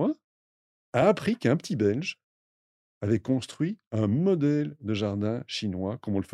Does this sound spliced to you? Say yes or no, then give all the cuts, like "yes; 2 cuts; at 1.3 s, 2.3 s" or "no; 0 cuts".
no; 0 cuts